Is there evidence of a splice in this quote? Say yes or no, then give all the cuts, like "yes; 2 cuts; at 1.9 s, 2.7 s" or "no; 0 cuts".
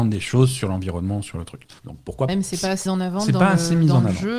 yes; 3 cuts; at 1.8 s, 2.3 s, 2.9 s